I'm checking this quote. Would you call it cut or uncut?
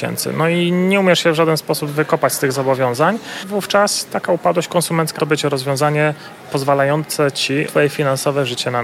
cut